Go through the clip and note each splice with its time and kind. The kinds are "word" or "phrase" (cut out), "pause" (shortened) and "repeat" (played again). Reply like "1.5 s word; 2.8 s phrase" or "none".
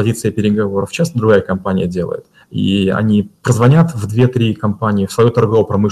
2.4 s pause